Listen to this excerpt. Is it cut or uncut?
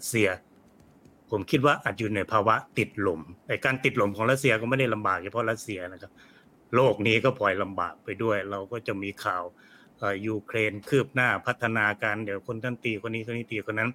uncut